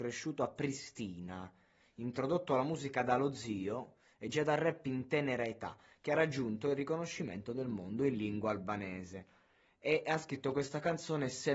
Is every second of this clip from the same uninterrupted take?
yes; 0 cuts

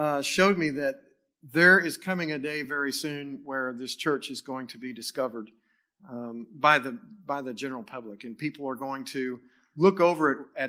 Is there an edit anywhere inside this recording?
no; 0 cuts

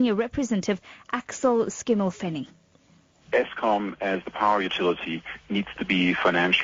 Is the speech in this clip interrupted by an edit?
no; 0 cuts

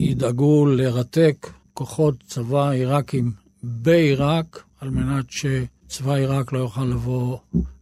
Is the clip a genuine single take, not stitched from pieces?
yes; 0 cuts

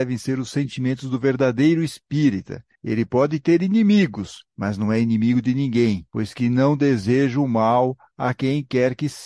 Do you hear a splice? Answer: yes; 1 cut; at 2.8 s

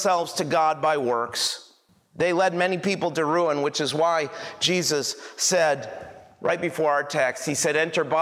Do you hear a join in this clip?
no; 0 cuts

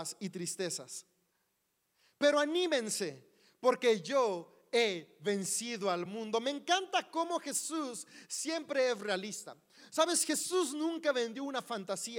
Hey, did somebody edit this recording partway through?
no; 0 cuts

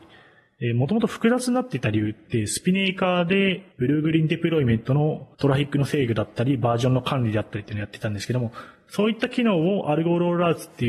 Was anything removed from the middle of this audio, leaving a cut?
yes; 2 cuts; at 3.7 s, 5.3 s

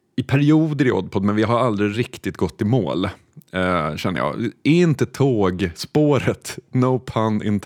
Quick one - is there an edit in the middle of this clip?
no; 0 cuts

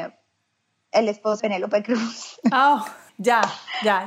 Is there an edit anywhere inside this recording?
yes; 2 cuts; at 1.4 s, 3.1 s

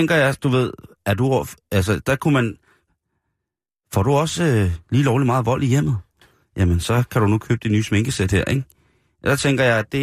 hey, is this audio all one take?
yes; 0 cuts

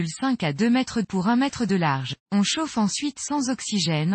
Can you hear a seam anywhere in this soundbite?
yes; 2 cuts; at 1.0 s, 2.2 s

